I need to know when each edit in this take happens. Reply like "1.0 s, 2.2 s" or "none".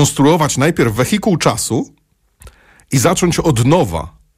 none